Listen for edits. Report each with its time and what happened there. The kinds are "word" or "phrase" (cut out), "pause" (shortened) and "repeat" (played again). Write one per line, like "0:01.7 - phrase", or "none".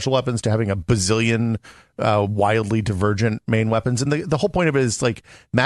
none